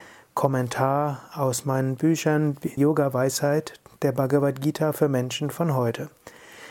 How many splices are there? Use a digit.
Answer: 1